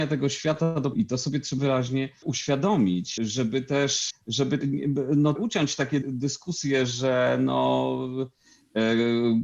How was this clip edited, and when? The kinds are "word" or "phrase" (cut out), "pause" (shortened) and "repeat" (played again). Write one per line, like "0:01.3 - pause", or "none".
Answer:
0:00.9 - word
0:01.6 - word
0:02.2 - word
0:03.2 - word
0:04.1 - word
0:04.6 - word
0:05.4 - word
0:06.0 - word